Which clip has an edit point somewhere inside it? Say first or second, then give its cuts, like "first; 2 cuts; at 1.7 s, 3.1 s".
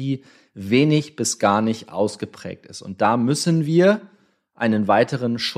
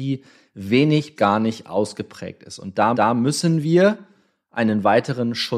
second; 2 cuts; at 1.2 s, 2.9 s